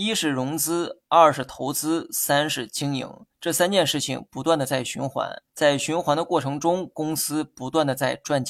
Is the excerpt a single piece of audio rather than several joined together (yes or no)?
no